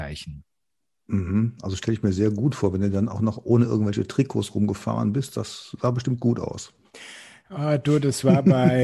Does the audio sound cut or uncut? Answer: uncut